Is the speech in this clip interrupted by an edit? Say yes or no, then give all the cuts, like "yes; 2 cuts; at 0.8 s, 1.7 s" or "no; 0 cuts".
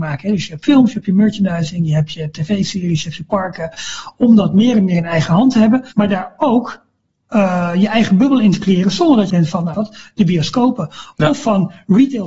yes; 3 cuts; at 5.9 s, 9.3 s, 9.7 s